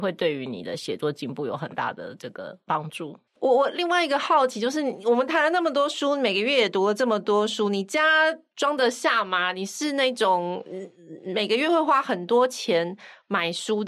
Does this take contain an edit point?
yes; 1 cut; at 3.3 s

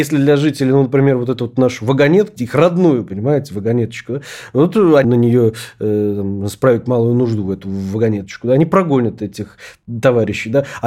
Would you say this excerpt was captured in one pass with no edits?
no; 2 cuts; at 2.4 s, 5.0 s

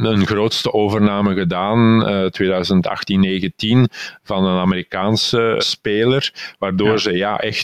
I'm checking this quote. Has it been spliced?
yes; 1 cut; at 5.6 s

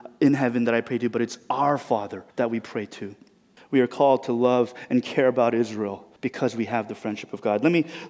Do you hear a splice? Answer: yes; 3 cuts; at 2.3 s, 3.6 s, 6.2 s

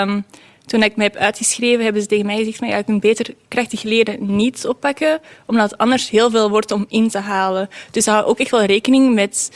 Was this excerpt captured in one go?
yes; 0 cuts

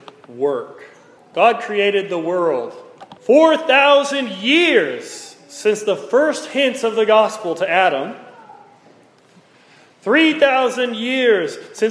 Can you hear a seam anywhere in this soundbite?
yes; 2 cuts; at 1.2 s, 3.2 s

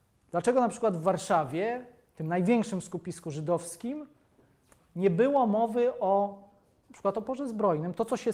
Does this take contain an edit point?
no; 0 cuts

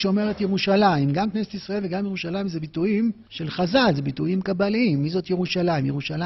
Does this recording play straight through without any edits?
no; 1 cut; at 3.3 s

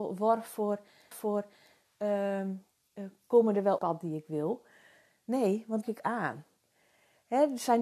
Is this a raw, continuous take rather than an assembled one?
no; 3 cuts; at 1.1 s, 3.8 s, 5.8 s

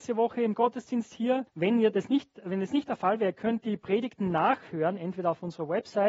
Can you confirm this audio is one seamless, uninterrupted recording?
no; 1 cut; at 1.5 s

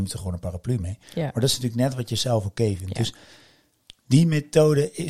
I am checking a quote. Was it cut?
yes; 1 cut; at 1.0 s

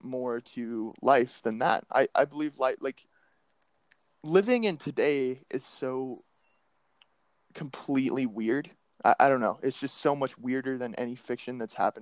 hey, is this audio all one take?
yes; 0 cuts

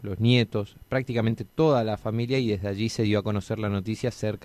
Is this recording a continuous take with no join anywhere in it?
yes; 0 cuts

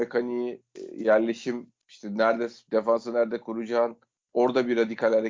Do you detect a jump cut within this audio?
yes; 1 cut; at 2.7 s

